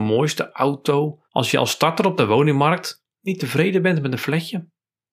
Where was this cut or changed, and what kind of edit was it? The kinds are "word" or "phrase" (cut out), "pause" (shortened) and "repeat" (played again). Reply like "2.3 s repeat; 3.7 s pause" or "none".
1.3 s pause; 3.1 s pause